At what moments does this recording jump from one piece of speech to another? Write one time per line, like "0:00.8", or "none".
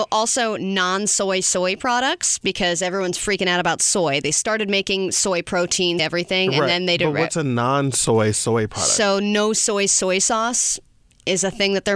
0:06.0